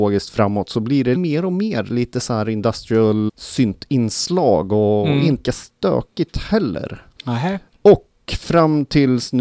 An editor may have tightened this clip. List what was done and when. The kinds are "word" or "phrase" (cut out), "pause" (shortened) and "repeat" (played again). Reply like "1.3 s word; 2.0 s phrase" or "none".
1.1 s word; 3.3 s word; 5.4 s word

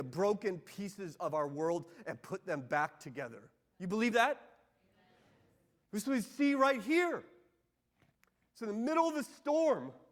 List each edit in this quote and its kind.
none

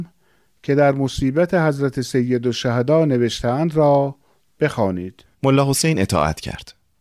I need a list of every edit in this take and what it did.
5.3 s pause

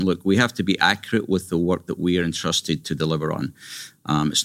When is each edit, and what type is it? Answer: none

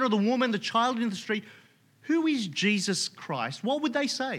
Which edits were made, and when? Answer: none

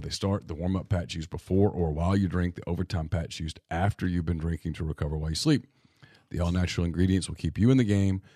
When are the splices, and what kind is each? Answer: none

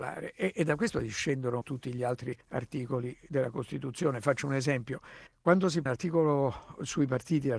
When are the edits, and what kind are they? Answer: 1.6 s phrase; 2.4 s pause; 5.9 s word

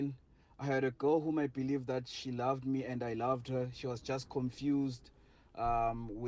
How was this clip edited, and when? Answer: none

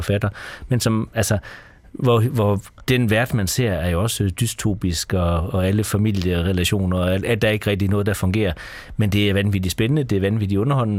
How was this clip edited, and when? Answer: none

